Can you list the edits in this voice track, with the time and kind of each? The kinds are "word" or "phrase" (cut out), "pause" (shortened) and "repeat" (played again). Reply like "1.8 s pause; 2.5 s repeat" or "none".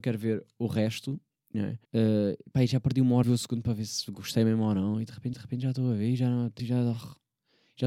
1.5 s phrase; 1.8 s pause; 3.2 s phrase; 5.3 s repeat; 6.6 s word